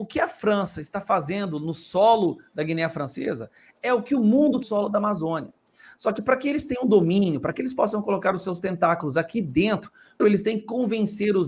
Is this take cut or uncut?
cut